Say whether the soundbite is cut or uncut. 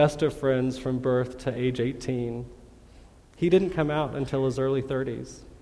uncut